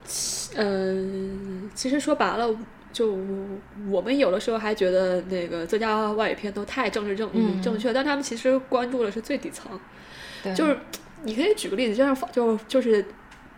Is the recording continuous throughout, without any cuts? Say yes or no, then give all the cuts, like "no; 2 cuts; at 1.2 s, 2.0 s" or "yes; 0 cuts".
no; 1 cut; at 7.3 s